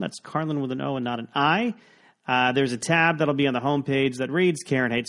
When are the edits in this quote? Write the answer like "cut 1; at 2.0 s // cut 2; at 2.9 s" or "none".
none